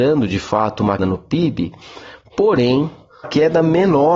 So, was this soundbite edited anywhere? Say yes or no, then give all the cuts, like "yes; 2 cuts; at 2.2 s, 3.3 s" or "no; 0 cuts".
yes; 2 cuts; at 1.0 s, 3.2 s